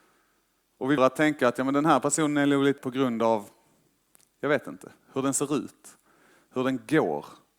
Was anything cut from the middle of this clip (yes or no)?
yes